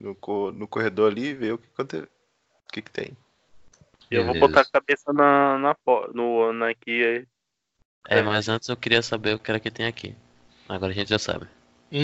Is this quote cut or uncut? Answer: uncut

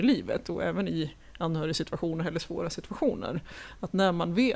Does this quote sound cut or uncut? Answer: uncut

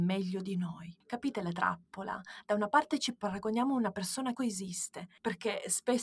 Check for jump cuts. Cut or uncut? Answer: cut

